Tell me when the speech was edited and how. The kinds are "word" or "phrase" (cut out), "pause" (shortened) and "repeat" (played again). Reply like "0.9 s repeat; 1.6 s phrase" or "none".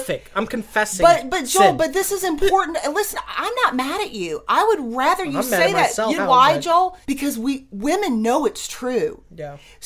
6.2 s word; 7.0 s pause